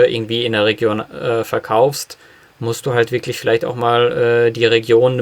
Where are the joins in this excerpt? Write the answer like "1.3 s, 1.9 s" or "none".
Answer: none